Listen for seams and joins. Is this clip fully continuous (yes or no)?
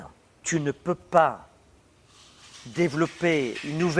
yes